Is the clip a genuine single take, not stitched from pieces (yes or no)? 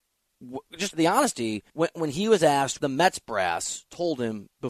no